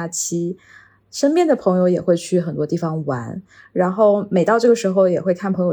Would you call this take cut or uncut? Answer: uncut